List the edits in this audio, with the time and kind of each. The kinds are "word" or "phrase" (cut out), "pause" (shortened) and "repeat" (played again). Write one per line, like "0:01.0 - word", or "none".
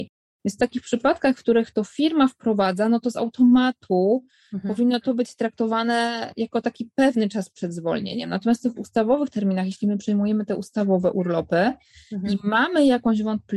none

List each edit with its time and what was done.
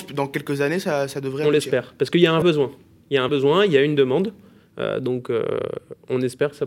0:02.4 - word
0:03.3 - word

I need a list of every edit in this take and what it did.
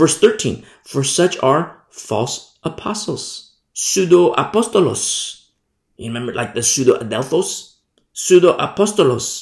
none

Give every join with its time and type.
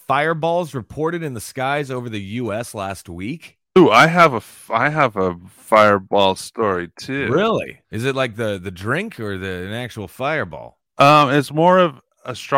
0:07.8 - pause
0:10.9 - pause

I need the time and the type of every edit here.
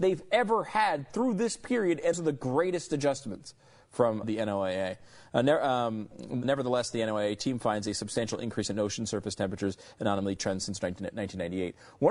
0:02.1 - word
0:04.2 - word
0:06.4 - word

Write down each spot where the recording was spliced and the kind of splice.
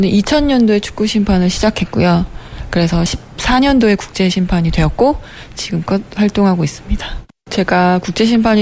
none

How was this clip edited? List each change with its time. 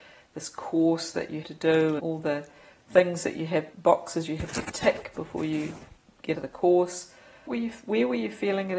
0:01.4 - word
0:02.0 - word
0:03.7 - word
0:06.3 - word
0:07.5 - word

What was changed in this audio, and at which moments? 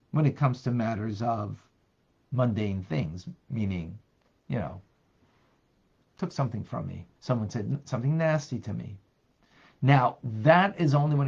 0:02.2 - word
0:06.0 - word
0:07.1 - pause

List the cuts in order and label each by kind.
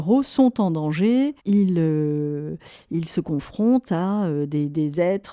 0:01.4 - pause

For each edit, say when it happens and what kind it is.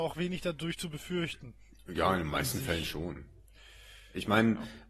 none

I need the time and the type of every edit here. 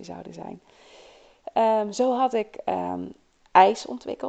none

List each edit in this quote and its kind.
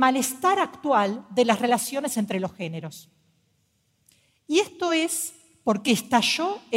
none

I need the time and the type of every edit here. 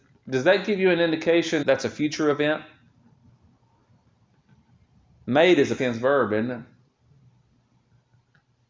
0:01.6 - word
0:05.8 - word

